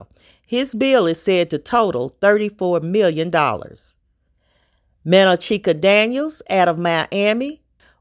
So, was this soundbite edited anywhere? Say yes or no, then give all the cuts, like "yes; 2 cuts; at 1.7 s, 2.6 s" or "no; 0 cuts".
no; 0 cuts